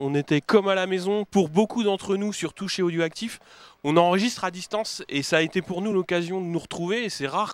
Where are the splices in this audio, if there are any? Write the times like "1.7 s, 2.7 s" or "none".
none